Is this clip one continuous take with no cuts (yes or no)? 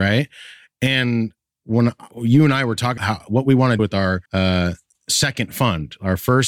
no